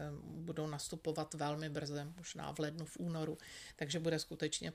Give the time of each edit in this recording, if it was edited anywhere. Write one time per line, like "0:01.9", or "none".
none